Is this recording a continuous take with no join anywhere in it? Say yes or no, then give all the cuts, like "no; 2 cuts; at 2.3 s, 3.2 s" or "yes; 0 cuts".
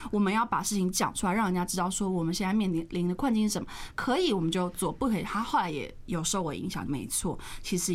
no; 1 cut; at 6.9 s